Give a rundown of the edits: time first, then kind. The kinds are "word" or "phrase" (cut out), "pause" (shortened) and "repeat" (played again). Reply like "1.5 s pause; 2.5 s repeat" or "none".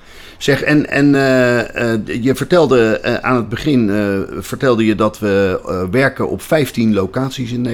none